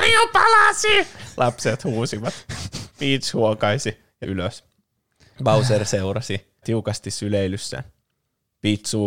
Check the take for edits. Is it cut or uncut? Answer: cut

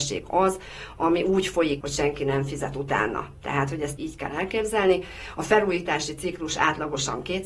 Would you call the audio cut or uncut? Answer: cut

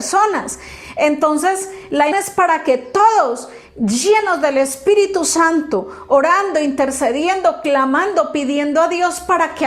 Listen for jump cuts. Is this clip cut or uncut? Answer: cut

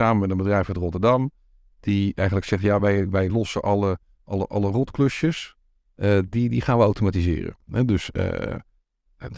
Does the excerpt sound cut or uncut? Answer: uncut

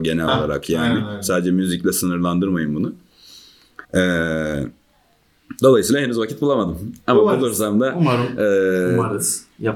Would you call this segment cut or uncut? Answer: cut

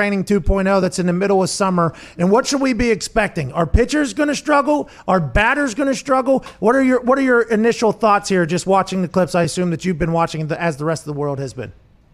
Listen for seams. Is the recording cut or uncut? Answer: uncut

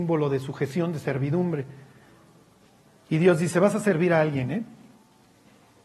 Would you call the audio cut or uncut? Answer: uncut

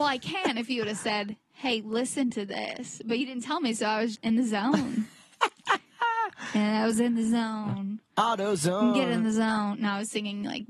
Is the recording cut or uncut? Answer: cut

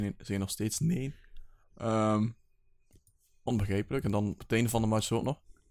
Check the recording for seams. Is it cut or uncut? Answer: cut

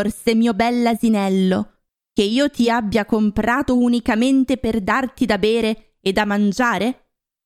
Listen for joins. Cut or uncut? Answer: uncut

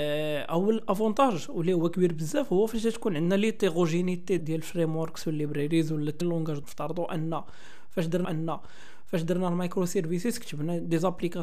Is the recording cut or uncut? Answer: cut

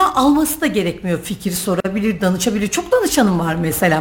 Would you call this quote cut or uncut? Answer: uncut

